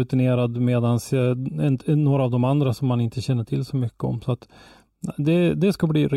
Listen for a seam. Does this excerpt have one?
no; 0 cuts

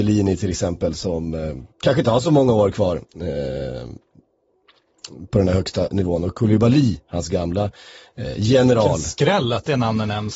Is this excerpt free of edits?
no; 1 cut; at 1.7 s

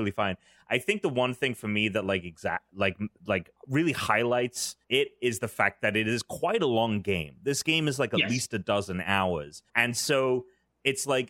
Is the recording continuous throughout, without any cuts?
no; 3 cuts; at 3.6 s, 4.8 s, 9.7 s

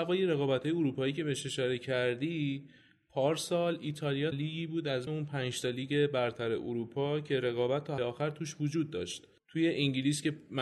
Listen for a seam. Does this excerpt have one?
yes; 3 cuts; at 4.3 s, 5.1 s, 8.0 s

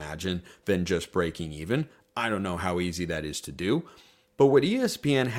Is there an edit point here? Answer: no; 0 cuts

